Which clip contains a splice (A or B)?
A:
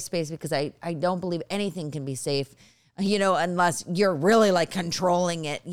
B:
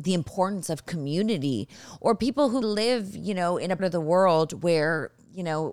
B